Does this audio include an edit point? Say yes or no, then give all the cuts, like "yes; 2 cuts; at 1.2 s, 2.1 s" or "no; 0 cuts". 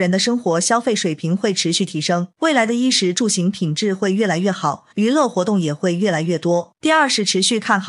yes; 3 cuts; at 2.3 s, 4.9 s, 6.8 s